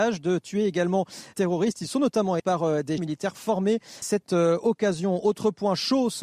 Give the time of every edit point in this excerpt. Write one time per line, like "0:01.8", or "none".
0:01.3
0:02.4
0:03.0
0:04.0